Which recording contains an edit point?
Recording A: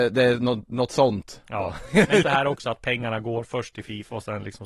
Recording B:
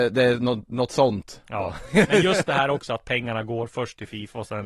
A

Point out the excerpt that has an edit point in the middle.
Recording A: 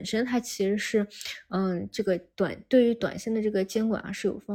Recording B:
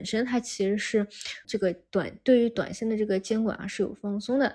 B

